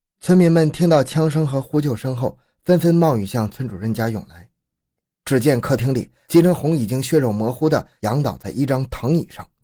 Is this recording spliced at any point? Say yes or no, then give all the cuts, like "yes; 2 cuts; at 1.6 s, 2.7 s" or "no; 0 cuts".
no; 0 cuts